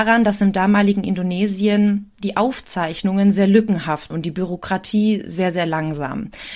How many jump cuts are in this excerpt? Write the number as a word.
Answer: one